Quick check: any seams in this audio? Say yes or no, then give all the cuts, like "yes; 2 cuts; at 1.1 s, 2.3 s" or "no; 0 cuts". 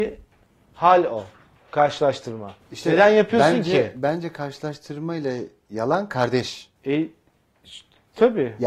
yes; 1 cut; at 6.8 s